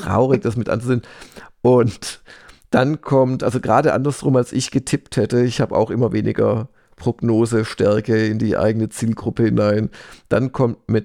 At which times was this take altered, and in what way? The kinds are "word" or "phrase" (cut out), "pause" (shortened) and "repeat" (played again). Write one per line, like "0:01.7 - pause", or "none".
none